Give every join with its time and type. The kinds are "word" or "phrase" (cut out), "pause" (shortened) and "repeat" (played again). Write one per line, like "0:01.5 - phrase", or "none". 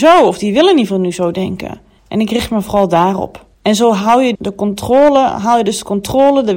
0:02.0 - pause
0:03.5 - pause
0:04.3 - word